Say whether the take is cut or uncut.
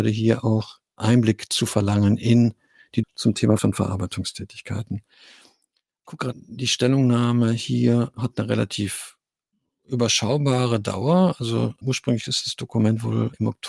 cut